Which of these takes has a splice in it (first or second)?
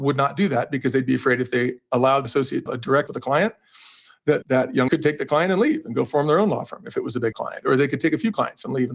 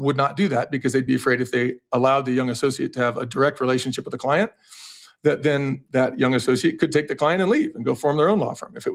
first